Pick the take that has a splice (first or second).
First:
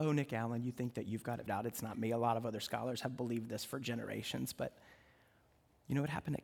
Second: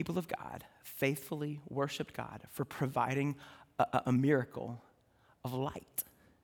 first